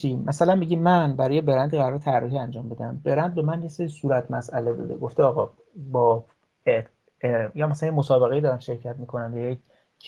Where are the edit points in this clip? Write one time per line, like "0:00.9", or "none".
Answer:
none